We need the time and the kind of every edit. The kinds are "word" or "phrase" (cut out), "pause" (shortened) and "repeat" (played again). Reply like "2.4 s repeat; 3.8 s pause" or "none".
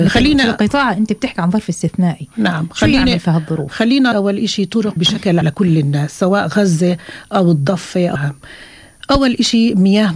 4.1 s word; 5.0 s word; 5.4 s word; 8.2 s word